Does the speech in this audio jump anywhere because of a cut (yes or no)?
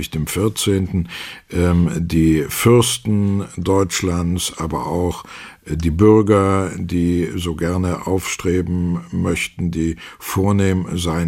no